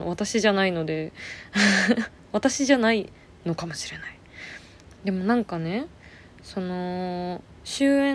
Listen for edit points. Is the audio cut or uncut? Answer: uncut